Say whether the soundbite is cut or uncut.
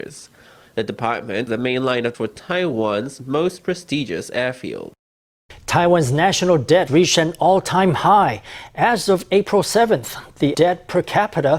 cut